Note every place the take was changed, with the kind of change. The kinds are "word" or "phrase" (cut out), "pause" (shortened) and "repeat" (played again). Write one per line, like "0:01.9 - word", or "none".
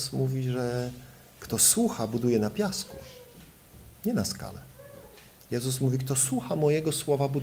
none